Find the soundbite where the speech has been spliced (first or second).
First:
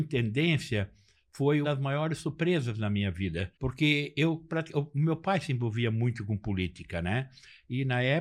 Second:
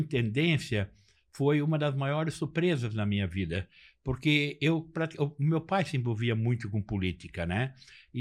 first